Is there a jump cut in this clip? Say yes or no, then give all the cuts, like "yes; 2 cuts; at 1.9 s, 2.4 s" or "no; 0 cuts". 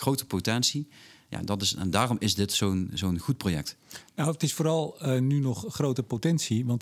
no; 0 cuts